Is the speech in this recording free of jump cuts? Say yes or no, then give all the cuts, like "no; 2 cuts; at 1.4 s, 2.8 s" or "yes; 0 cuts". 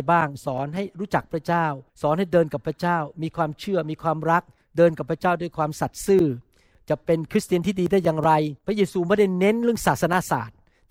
no; 3 cuts; at 1.9 s, 4.6 s, 8.6 s